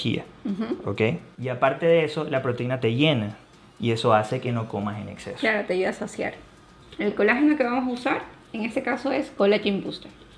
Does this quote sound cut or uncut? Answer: uncut